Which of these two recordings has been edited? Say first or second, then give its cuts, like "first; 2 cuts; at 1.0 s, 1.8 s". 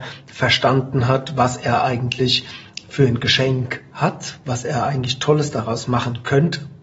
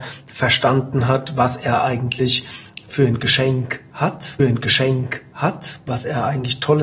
second; 1 cut; at 4.4 s